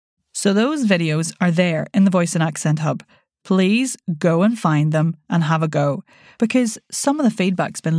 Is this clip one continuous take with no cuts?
yes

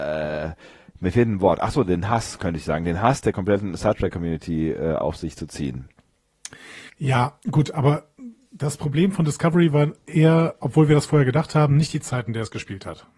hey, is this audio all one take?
no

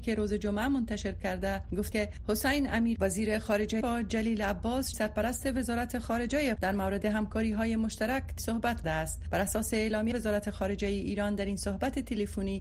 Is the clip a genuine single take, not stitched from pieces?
no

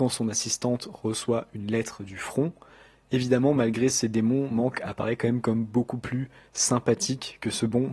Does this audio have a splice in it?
no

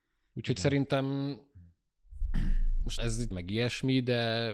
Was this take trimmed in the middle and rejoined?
yes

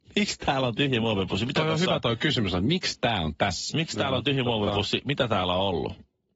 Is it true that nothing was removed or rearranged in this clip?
yes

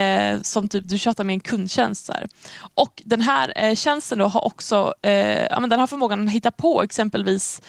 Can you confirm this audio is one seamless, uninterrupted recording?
yes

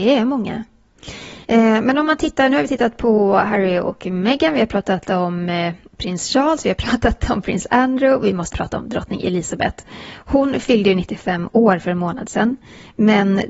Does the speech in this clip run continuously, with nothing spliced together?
no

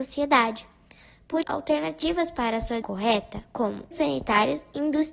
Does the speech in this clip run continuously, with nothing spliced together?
no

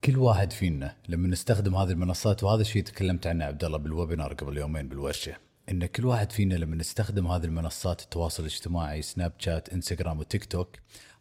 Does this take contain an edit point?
no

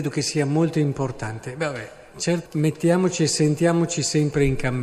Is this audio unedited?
no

